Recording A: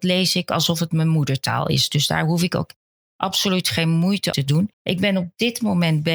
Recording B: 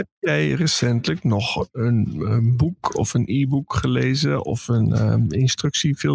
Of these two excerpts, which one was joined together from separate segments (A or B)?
A